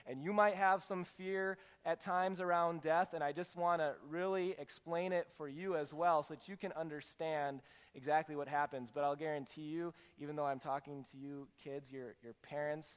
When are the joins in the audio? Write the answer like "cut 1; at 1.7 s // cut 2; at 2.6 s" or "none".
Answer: none